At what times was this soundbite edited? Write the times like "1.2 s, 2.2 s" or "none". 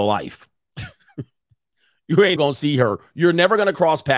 2.4 s